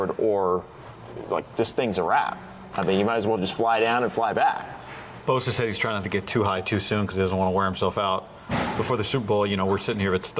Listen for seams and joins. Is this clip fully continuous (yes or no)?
yes